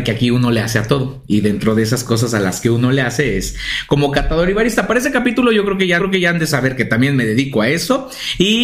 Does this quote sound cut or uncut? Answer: cut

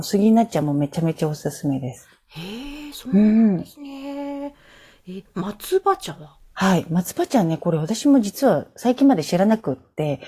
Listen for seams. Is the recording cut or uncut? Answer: uncut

